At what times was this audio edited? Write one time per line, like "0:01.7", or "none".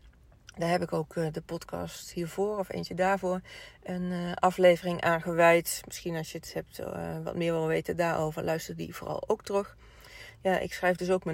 none